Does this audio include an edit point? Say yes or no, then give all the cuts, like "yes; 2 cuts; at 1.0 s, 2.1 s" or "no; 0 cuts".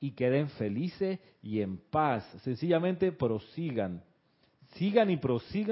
no; 0 cuts